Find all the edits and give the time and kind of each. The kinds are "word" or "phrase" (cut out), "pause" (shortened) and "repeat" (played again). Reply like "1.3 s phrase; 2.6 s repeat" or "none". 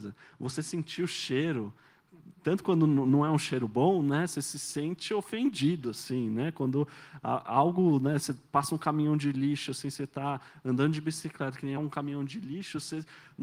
11.8 s phrase